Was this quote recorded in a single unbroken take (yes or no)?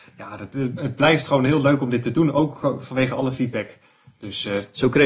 yes